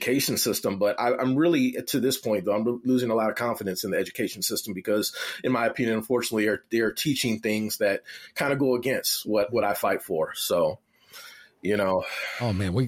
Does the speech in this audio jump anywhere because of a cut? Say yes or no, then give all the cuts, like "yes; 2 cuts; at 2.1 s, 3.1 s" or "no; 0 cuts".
no; 0 cuts